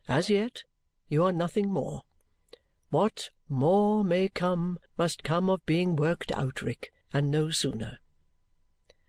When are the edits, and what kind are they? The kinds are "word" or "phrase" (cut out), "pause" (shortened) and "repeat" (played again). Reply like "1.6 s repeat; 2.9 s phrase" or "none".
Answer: 4.9 s pause; 7.0 s pause